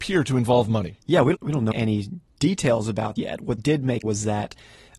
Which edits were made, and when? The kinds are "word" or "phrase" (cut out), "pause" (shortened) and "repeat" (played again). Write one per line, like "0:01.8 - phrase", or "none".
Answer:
0:01.3 - word
0:01.7 - word
0:03.2 - word
0:03.6 - word
0:04.0 - word